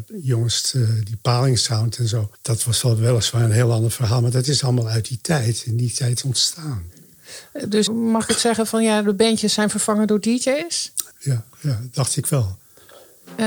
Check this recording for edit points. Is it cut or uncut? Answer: cut